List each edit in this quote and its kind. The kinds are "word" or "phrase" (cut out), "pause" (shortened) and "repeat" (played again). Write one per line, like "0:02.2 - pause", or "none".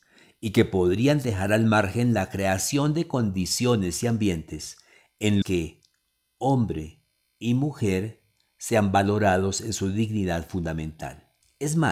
0:05.4 - word